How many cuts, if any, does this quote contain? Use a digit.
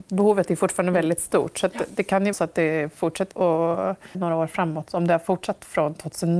3